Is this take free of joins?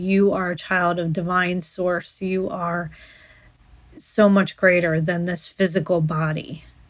yes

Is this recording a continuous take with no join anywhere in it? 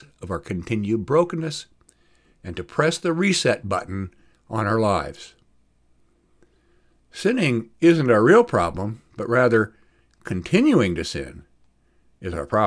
yes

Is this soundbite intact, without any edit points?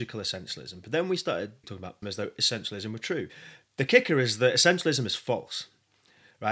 no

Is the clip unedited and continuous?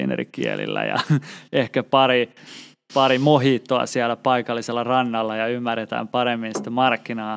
yes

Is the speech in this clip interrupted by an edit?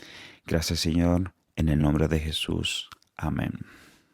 no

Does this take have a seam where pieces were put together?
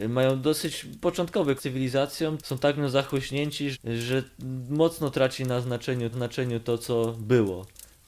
yes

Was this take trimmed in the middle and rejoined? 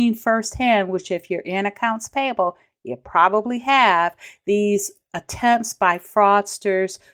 no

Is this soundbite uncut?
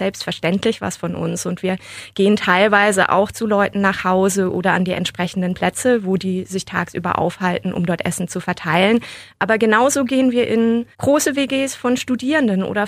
no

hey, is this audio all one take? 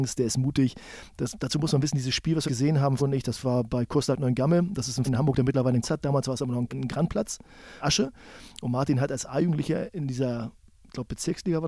no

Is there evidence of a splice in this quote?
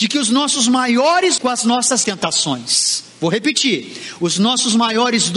yes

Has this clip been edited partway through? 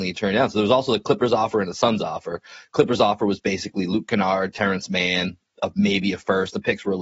no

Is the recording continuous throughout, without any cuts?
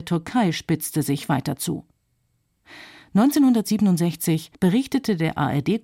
no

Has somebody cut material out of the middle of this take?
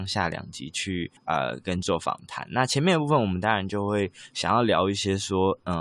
yes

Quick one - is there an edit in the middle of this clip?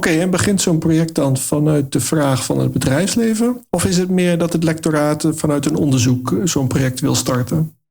no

